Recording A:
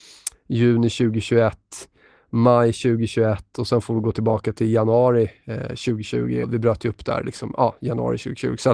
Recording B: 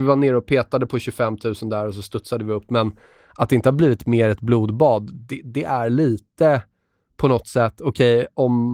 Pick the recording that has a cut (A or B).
A